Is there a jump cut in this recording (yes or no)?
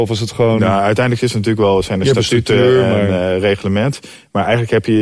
no